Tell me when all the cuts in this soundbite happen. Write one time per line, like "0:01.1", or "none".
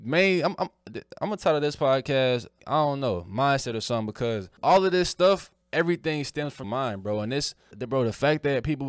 0:02.6
0:04.6
0:05.6
0:06.6
0:07.7

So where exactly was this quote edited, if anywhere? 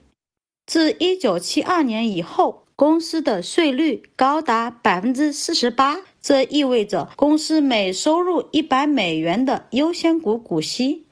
0:07.1

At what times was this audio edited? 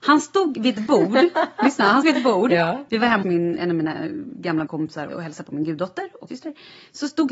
0:02.0
0:03.2
0:03.6
0:04.7
0:05.1
0:06.3

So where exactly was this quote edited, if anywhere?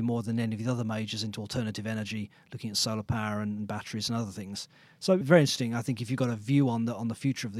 0:05.2

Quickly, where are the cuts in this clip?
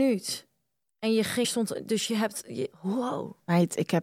0:01.4
0:02.7

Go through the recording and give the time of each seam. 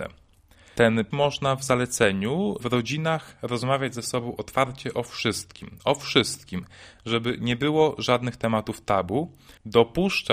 0:01.1
0:02.6

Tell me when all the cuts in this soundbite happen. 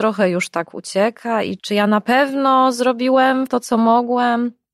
0:01.6
0:03.5

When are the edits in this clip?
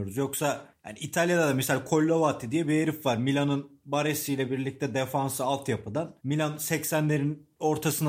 0:06.2

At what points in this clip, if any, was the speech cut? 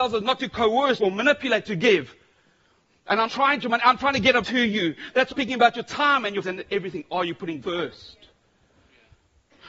0:01.0
0:01.7
0:03.3
0:03.6
0:04.4
0:05.3
0:06.4
0:07.6

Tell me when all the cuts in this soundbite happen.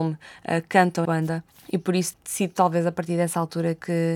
0:01.0
0:01.5
0:02.1

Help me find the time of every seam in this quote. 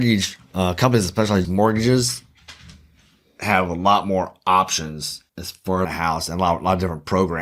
0:01.4
0:05.3
0:05.8

